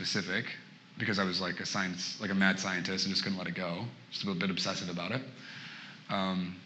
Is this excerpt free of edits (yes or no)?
yes